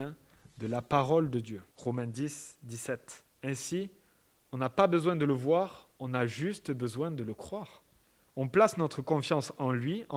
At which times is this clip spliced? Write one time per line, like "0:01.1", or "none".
0:01.7
0:03.3
0:08.0

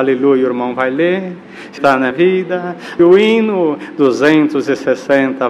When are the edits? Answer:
0:01.8
0:02.1
0:03.0

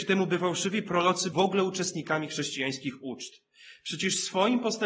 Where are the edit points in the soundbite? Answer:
0:01.3

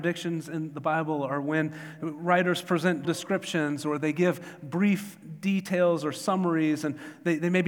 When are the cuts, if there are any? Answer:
0:03.0

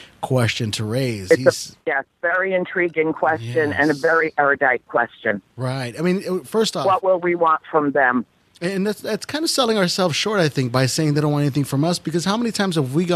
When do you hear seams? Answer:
none

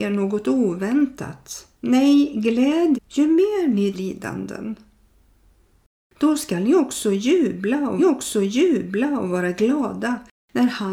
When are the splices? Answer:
0:01.7
0:02.9
0:03.9
0:08.0

